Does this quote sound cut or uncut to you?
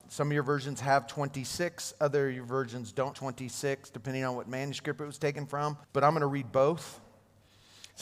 cut